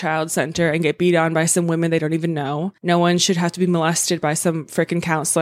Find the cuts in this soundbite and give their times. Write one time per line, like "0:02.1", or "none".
0:02.8